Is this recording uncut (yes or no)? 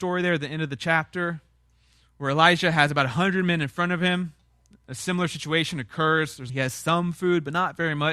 no